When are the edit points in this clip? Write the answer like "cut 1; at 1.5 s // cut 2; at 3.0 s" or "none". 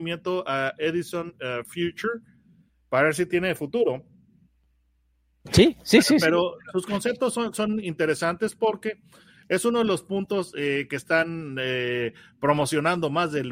none